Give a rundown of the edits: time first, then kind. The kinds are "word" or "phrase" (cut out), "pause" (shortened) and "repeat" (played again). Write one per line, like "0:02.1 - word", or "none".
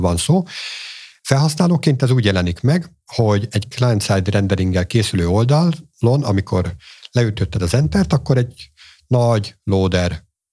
none